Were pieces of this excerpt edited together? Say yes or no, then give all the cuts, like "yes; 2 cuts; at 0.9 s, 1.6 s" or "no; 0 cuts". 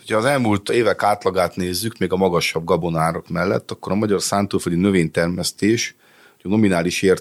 no; 0 cuts